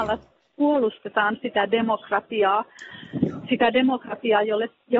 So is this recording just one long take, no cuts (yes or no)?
yes